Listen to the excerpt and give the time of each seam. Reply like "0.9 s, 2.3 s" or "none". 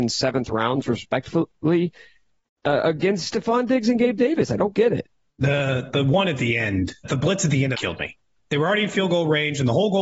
5.3 s, 7.0 s, 7.7 s